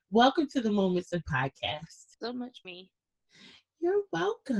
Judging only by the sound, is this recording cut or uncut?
cut